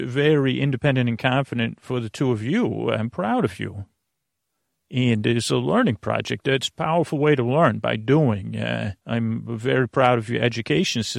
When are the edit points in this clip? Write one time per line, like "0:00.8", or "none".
0:09.0